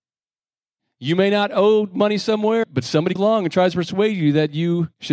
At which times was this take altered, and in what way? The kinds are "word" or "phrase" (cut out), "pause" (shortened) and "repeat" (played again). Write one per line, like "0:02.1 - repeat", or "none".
0:02.6 - word
0:03.2 - word